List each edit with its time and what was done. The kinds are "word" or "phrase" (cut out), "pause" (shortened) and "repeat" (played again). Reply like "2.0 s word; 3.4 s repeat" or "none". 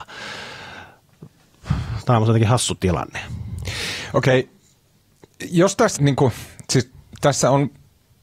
6.0 s word